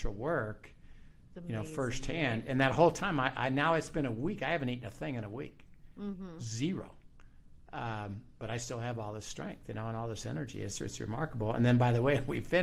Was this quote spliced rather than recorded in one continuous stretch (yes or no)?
no